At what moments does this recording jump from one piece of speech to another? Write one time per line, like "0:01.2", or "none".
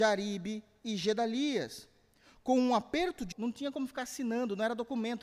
0:03.3